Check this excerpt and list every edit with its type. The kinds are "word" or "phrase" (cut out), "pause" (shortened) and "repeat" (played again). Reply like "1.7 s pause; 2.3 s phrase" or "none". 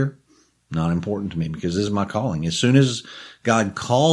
none